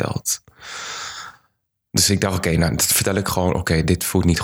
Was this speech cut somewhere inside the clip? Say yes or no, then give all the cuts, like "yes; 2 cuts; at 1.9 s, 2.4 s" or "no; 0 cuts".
no; 0 cuts